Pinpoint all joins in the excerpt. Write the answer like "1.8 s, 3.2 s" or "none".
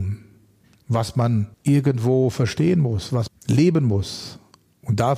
1.5 s, 3.3 s